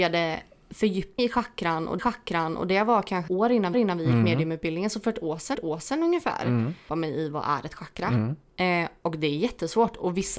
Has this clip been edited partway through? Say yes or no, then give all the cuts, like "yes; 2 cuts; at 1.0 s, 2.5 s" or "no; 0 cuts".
yes; 6 cuts; at 1.2 s, 2.0 s, 3.3 s, 3.7 s, 5.5 s, 6.9 s